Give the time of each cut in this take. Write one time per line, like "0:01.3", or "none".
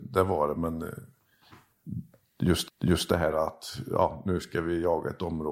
0:02.7